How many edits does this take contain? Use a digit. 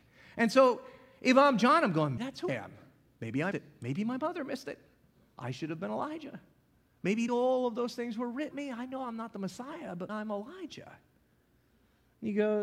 6